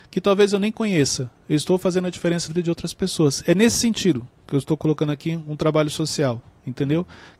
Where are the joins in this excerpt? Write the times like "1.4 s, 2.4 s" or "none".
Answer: 1.4 s, 2.5 s